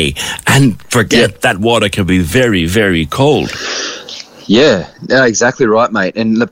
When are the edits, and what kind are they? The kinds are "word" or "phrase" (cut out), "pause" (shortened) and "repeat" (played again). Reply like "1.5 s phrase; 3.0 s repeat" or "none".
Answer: 4.9 s pause